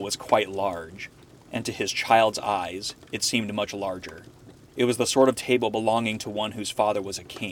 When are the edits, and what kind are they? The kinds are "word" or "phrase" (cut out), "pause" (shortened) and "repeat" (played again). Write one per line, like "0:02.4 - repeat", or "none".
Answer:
0:04.7 - pause